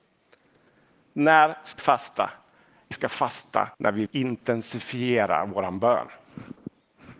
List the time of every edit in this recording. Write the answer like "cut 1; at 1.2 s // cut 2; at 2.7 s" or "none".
cut 1; at 1.8 s // cut 2; at 2.9 s // cut 3; at 3.7 s // cut 4; at 4.1 s

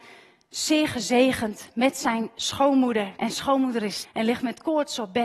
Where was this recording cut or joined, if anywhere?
cut 1; at 3.2 s // cut 2; at 4.0 s

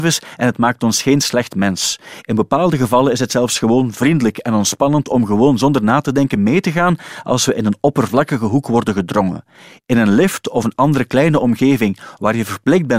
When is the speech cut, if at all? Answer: none

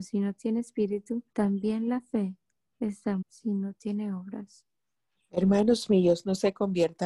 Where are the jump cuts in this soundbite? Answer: cut 1; at 1.3 s // cut 2; at 3.2 s // cut 3; at 5.2 s

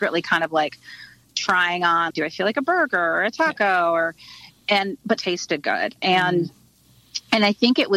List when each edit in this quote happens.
cut 1; at 2.1 s // cut 2; at 5.2 s

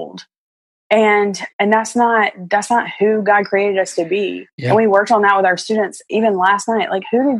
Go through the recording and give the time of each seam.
cut 1; at 1.5 s // cut 2; at 4.5 s

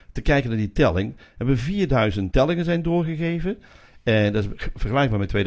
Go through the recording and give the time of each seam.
cut 1; at 2.3 s

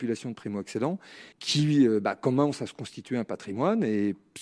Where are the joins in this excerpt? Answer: cut 1; at 1.3 s

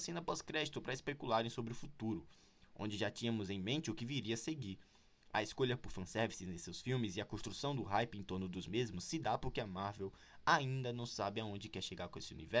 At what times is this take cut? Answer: none

